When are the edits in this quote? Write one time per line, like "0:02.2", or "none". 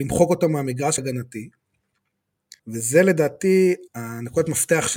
0:01.0
0:02.6
0:03.9